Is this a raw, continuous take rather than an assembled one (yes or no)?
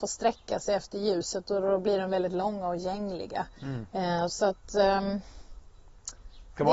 yes